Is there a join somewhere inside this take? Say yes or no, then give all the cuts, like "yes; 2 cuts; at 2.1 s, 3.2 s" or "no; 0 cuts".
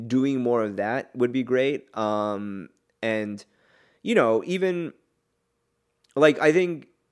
no; 0 cuts